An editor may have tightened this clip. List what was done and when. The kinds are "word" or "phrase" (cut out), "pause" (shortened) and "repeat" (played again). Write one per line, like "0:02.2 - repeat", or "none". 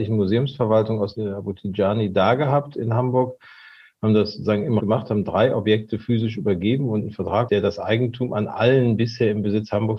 0:01.1 - word
0:04.8 - word
0:07.5 - word